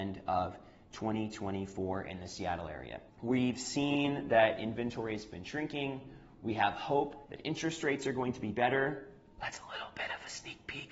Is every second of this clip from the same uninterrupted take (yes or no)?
no